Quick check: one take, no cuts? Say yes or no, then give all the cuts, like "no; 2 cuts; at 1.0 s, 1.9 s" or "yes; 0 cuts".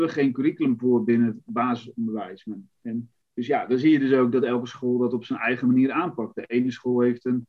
no; 1 cut; at 3.2 s